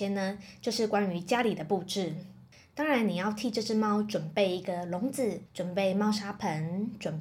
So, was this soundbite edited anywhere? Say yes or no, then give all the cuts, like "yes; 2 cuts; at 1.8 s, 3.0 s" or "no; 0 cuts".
no; 0 cuts